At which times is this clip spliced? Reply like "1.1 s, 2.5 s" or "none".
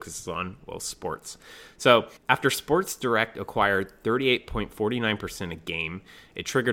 2.2 s